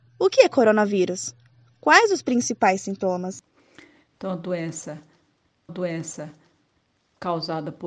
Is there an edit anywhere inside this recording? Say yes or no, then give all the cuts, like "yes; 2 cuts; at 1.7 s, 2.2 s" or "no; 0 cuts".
yes; 1 cut; at 5.7 s